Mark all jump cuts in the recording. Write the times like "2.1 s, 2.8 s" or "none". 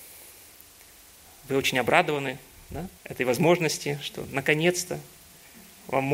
3.0 s